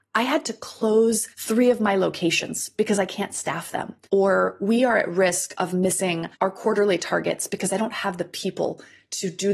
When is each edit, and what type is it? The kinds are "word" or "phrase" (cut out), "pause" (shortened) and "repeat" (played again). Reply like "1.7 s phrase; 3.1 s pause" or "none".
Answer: 1.3 s pause; 4.0 s pause; 6.3 s pause